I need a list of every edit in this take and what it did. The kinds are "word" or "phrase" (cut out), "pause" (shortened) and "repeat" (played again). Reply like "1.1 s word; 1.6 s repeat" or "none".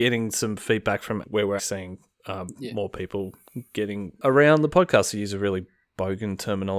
1.2 s word; 1.6 s word